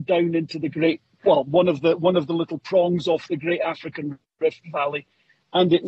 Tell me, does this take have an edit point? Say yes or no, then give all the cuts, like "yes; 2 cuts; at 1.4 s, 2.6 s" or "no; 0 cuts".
no; 0 cuts